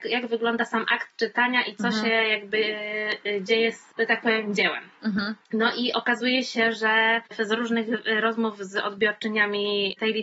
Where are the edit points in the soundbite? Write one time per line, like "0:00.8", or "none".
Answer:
0:03.9
0:05.4